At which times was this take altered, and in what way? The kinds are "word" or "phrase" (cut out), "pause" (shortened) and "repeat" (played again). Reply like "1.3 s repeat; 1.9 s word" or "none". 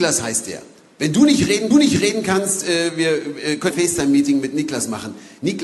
1.7 s repeat; 3.7 s phrase